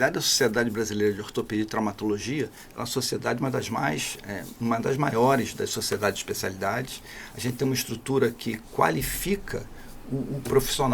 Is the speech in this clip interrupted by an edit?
no; 0 cuts

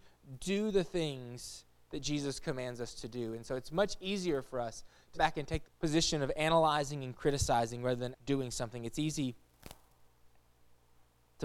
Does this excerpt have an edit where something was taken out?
yes; 3 cuts; at 5.1 s, 5.6 s, 8.1 s

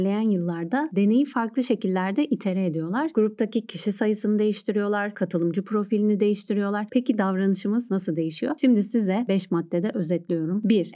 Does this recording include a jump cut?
no; 0 cuts

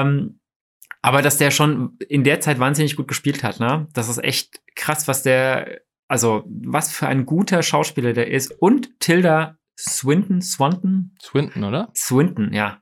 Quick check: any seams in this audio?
no; 0 cuts

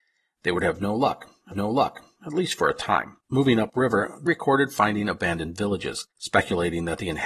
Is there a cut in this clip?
yes; 4 cuts; at 1.5 s, 3.2 s, 4.3 s, 6.1 s

